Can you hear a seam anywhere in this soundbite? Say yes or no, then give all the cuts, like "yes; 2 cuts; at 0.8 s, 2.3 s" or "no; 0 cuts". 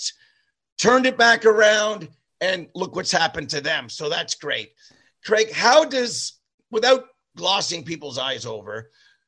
no; 0 cuts